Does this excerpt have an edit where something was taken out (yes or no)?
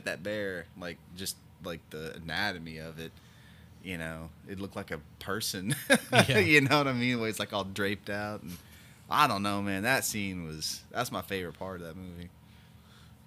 no